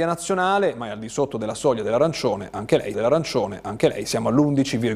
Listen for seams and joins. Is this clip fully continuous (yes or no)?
no